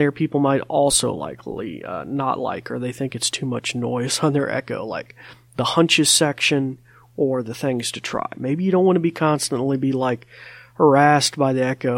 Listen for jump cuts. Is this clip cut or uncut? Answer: uncut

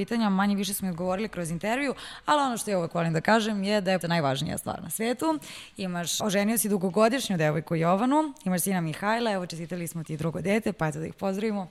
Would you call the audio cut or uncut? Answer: cut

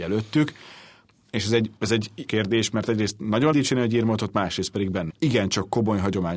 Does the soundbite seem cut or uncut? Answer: cut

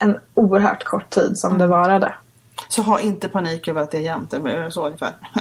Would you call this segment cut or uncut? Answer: uncut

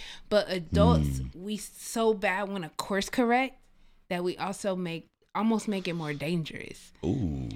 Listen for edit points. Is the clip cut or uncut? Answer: uncut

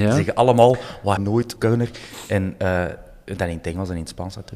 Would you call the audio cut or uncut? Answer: cut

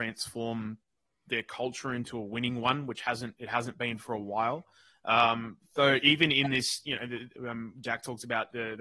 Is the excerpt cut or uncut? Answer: uncut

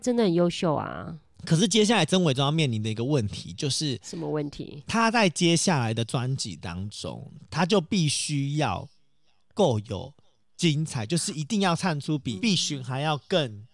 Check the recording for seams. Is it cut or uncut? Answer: cut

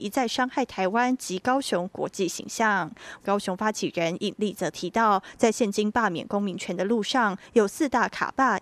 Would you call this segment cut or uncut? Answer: cut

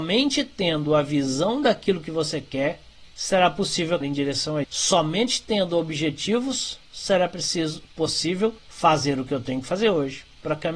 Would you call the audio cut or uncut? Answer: cut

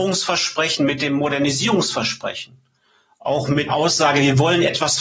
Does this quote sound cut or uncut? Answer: cut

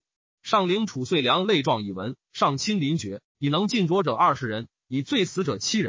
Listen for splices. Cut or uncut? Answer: uncut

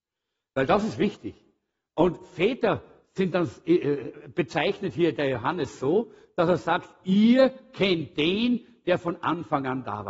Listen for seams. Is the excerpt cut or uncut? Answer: uncut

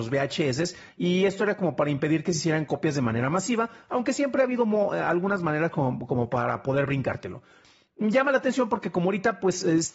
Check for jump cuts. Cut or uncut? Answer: uncut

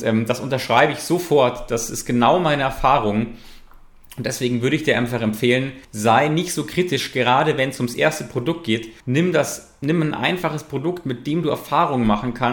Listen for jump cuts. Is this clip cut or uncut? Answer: cut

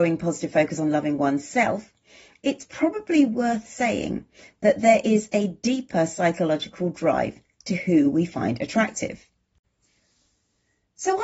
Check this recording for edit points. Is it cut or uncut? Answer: uncut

